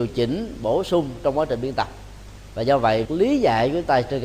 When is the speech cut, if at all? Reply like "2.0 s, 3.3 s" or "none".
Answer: 3.0 s